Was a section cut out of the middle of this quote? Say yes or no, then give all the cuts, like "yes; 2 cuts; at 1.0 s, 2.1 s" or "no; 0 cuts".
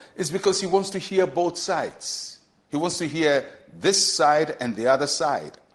no; 0 cuts